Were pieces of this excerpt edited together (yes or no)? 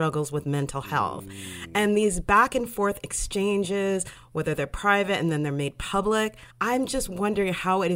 yes